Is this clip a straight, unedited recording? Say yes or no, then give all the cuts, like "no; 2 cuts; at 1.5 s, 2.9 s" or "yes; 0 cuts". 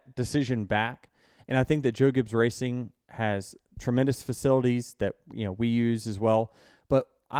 yes; 0 cuts